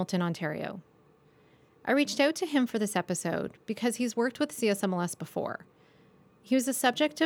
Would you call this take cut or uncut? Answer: uncut